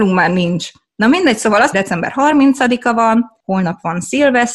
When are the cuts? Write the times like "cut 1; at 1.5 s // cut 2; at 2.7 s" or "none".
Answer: cut 1; at 1.7 s